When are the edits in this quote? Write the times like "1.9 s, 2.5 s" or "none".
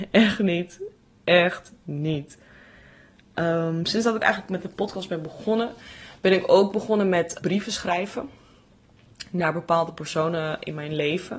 4.2 s, 7.4 s